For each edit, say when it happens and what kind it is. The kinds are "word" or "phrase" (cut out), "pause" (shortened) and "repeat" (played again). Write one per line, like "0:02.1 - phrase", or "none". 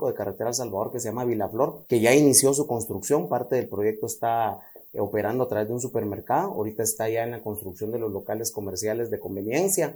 0:01.9 - pause